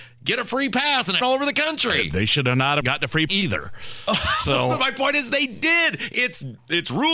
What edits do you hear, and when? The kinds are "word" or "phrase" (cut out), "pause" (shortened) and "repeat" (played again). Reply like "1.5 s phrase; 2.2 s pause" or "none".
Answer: 1.2 s word; 2.8 s phrase; 3.3 s word

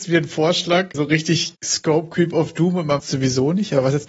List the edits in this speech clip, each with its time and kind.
0.9 s word; 1.5 s word; 3.0 s word

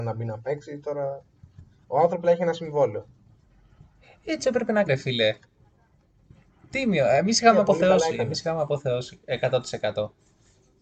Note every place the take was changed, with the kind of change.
2.2 s word; 4.4 s word; 4.9 s word

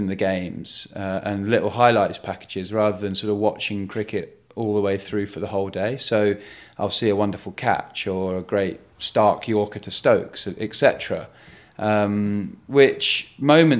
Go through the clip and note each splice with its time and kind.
none

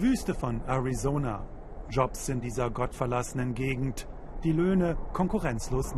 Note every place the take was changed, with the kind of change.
2.4 s phrase

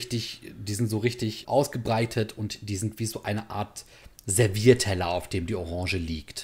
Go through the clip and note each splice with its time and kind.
1.4 s word

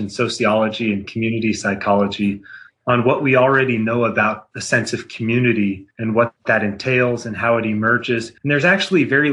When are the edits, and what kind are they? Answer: 5.9 s pause; 8.4 s pause

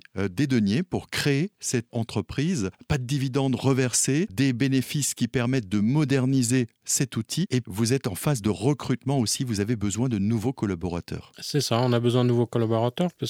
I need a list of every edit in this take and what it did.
1.9 s word; 4.3 s word; 7.6 s word

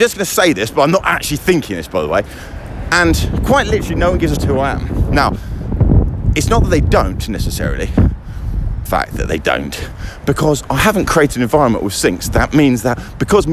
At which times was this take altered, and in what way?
4.4 s phrase; 8.9 s phrase

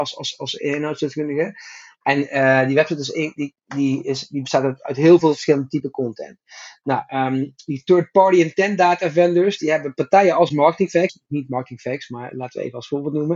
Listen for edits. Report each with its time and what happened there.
11.1 s phrase

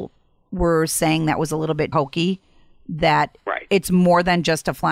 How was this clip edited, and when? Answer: 1.9 s word

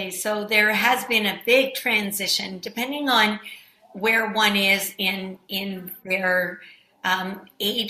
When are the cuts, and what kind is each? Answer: none

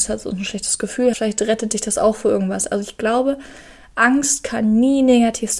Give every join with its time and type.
1.1 s word

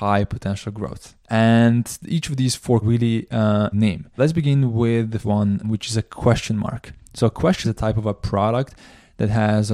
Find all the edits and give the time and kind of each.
1.2 s pause; 2.8 s phrase; 3.7 s word; 4.2 s word; 5.2 s word; 5.6 s word; 7.6 s phrase

